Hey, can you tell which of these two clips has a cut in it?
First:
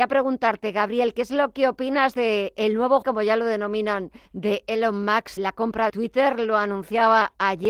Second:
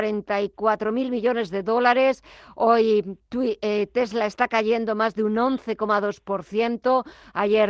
first; 4 cuts; at 3.0 s, 4.3 s, 5.4 s, 5.9 s

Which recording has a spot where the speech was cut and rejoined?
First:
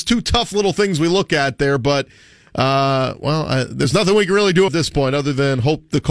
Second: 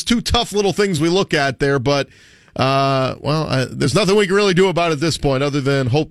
first; 1 cut; at 4.7 s

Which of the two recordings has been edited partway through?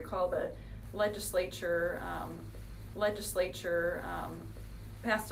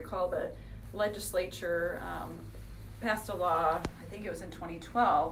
first; 1 cut; at 2.9 s

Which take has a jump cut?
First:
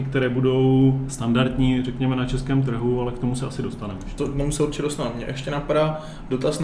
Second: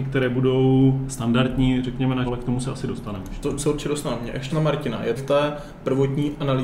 second; 4 cuts; at 2.3 s, 3.6 s, 4.5 s, 5.2 s

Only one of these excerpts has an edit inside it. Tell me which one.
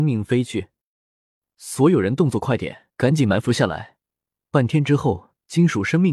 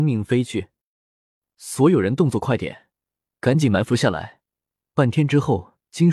first; 1 cut; at 2.9 s

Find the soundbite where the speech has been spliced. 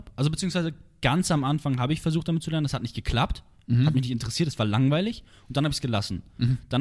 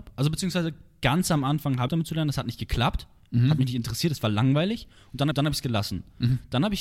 second; 2 cuts; at 1.9 s, 5.3 s

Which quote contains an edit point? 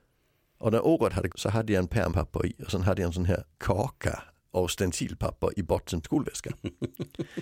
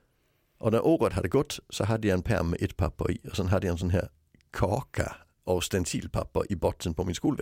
first; 4 cuts; at 1.3 s, 2.1 s, 3.5 s, 6.0 s

